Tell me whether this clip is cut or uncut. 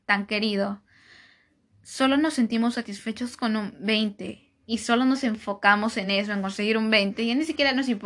uncut